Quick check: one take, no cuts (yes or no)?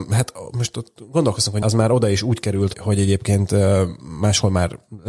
no